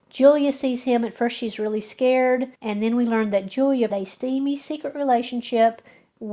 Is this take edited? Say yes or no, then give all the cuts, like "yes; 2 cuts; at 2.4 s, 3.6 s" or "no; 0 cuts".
yes; 2 cuts; at 2.5 s, 3.9 s